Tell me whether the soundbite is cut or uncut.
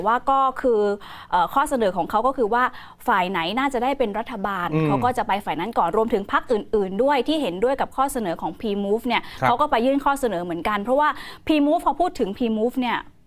uncut